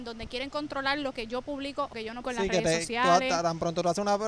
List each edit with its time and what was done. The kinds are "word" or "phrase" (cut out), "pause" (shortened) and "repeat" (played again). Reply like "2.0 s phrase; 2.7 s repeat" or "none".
1.9 s word; 2.2 s word